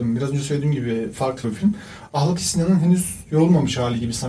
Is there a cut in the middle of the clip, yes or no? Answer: yes